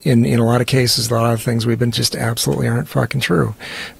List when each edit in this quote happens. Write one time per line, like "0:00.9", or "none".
0:01.9

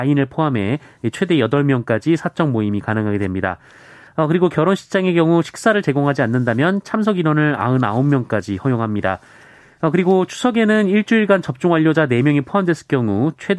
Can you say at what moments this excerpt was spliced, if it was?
none

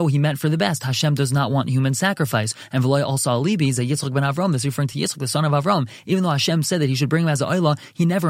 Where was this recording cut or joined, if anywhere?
none

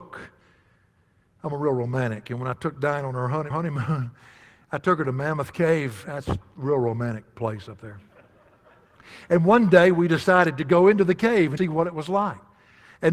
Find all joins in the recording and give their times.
0:03.5
0:11.6

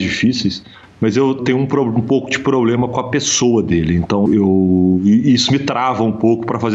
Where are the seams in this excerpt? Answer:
0:01.4
0:04.3

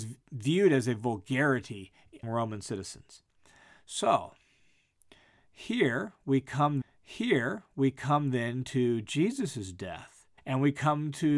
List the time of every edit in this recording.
0:02.2
0:06.8
0:10.4

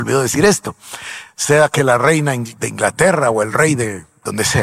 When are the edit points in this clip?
none

